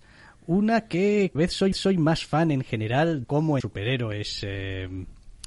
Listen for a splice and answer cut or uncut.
cut